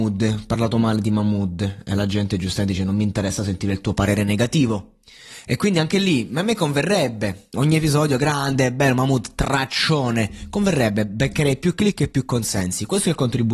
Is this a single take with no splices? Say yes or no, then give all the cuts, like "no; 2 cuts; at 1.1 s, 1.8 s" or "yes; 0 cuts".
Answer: no; 1 cut; at 7.5 s